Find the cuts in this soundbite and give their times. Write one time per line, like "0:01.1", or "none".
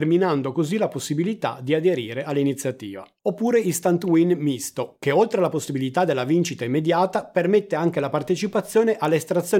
none